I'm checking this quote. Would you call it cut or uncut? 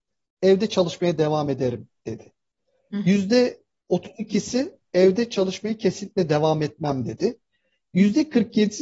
uncut